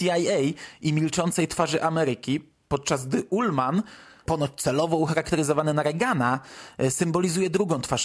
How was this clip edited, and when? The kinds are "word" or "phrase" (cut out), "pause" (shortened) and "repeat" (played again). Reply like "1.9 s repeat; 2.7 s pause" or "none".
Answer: none